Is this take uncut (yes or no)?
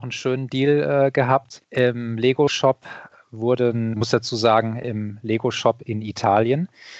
no